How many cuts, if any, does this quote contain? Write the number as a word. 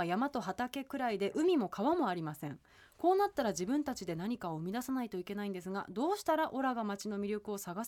zero